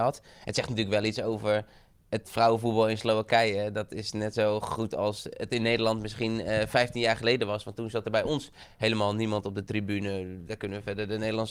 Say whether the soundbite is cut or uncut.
uncut